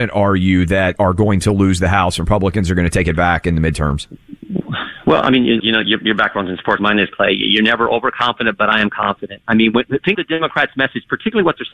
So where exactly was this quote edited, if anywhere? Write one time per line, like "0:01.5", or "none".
0:01.0
0:05.6
0:06.8
0:10.1